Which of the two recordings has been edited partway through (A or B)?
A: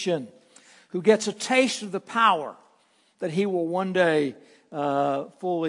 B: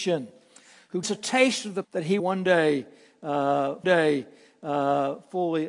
B